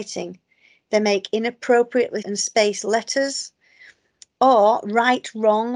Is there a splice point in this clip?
yes; 1 cut; at 2.2 s

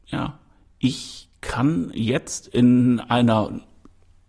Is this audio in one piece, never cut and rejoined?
yes; 0 cuts

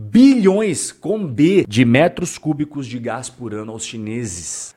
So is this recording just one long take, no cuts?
yes; 0 cuts

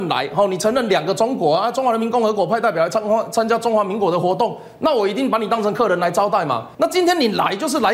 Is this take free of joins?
no; 1 cut; at 6.7 s

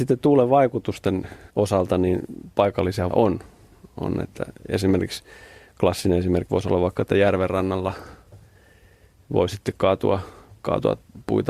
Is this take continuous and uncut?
no; 3 cuts; at 1.5 s, 3.1 s, 6.5 s

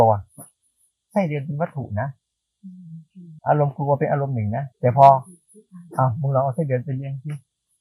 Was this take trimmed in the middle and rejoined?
yes; 3 cuts; at 3.4 s, 4.7 s, 5.9 s

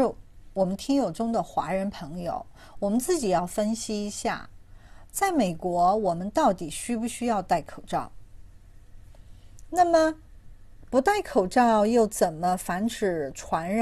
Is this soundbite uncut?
no; 1 cut; at 10.8 s

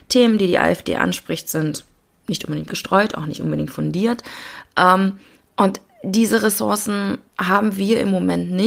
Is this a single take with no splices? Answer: no; 2 cuts; at 2.7 s, 7.3 s

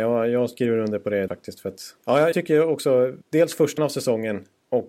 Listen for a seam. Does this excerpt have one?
yes; 5 cuts; at 1.3 s, 2.0 s, 2.3 s, 3.2 s, 3.8 s

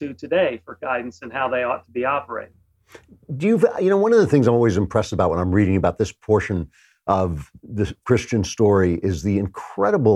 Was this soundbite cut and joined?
no; 0 cuts

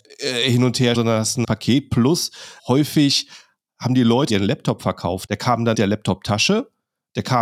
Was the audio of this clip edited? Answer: yes; 6 cuts; at 0.9 s, 1.4 s, 2.6 s, 4.3 s, 5.3 s, 5.7 s

